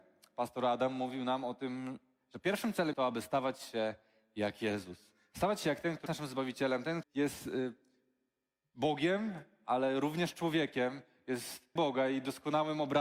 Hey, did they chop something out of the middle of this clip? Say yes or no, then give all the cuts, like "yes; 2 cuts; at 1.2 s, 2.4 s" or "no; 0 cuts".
yes; 4 cuts; at 2.9 s, 6.1 s, 7.0 s, 11.8 s